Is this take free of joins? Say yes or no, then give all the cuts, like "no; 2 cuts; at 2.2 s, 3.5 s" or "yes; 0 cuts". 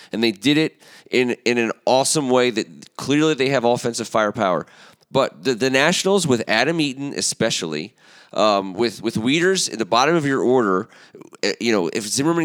yes; 0 cuts